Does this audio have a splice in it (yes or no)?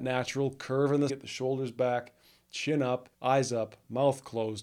yes